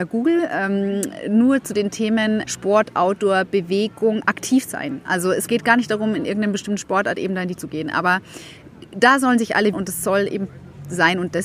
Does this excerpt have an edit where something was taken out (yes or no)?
yes